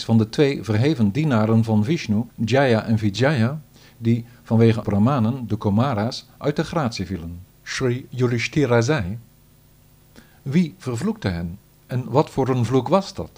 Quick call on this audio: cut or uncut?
cut